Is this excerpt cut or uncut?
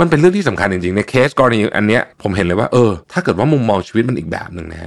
cut